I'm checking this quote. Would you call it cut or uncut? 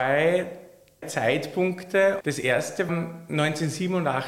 cut